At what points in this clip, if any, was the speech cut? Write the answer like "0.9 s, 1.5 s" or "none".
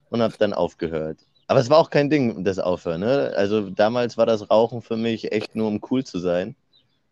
1.4 s

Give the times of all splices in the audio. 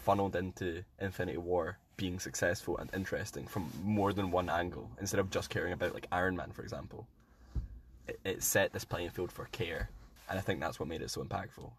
1.9 s, 10.2 s

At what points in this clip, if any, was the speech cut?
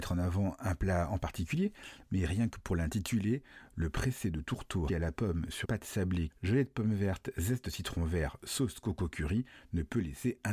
4.9 s, 5.6 s, 6.3 s

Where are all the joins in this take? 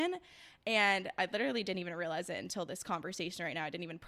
none

